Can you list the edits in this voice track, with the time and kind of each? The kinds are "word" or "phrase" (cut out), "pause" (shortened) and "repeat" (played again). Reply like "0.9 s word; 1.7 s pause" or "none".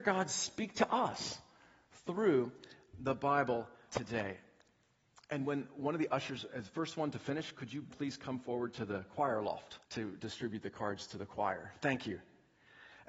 3.9 s word; 7.9 s word; 9.8 s pause